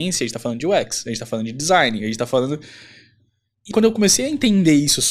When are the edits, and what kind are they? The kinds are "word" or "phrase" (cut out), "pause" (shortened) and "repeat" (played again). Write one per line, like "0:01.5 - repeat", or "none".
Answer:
0:03.7 - word